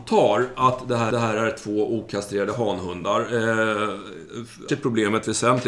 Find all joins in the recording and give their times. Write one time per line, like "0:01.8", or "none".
0:01.1
0:04.7